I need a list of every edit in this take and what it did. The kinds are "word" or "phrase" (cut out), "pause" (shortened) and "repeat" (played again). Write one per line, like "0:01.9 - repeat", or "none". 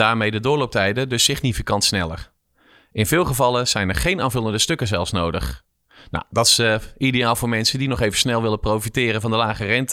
none